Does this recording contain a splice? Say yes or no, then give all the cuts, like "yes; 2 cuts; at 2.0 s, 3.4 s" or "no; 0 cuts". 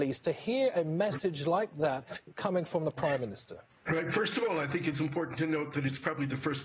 yes; 1 cut; at 3.7 s